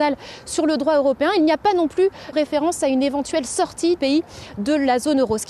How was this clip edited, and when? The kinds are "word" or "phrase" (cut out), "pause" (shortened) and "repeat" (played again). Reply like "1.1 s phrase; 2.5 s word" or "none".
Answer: 2.3 s word; 4.0 s word

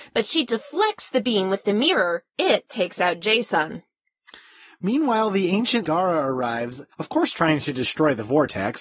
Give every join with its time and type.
2.3 s word; 5.8 s word; 6.9 s pause

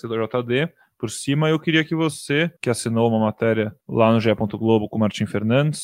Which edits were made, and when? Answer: 2.6 s pause; 3.8 s pause

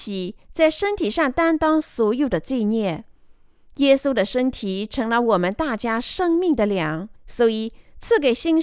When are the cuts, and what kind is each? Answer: 7.2 s pause

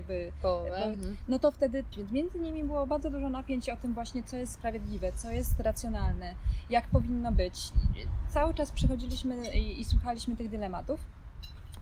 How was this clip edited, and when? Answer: 1.9 s phrase

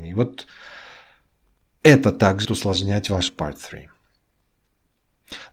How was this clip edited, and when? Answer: 2.4 s word; 3.3 s word

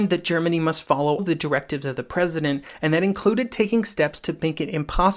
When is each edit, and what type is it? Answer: 1.2 s word

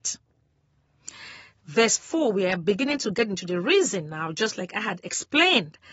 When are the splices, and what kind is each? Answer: none

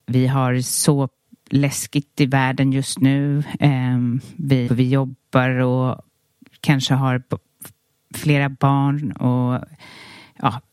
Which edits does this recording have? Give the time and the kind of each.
4.7 s phrase

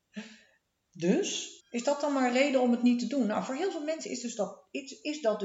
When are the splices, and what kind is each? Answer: 1.6 s pause

